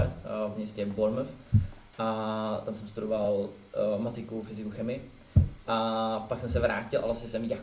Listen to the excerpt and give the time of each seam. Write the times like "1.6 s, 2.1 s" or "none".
none